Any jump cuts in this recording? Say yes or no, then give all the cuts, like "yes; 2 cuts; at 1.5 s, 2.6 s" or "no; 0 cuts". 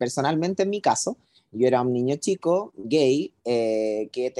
no; 0 cuts